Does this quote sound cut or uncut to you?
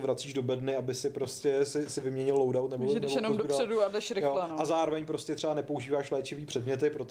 uncut